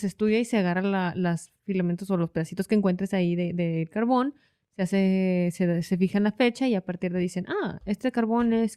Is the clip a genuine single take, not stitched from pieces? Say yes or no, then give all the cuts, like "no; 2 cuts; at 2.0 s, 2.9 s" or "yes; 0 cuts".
yes; 0 cuts